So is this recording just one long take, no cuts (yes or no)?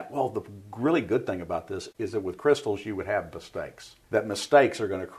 no